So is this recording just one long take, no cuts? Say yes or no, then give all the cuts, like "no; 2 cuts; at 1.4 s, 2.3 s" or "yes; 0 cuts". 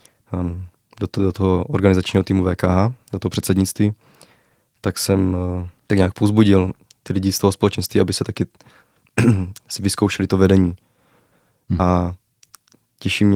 yes; 0 cuts